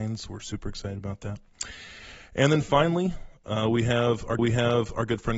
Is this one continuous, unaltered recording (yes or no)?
no